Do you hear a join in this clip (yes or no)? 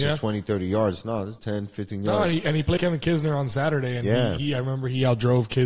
yes